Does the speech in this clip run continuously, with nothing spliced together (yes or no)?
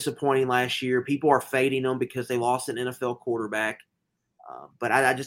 yes